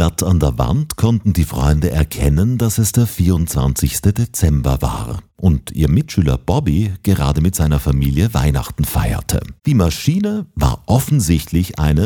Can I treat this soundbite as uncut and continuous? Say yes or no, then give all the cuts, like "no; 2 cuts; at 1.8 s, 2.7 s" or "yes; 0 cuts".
no; 2 cuts; at 5.3 s, 9.6 s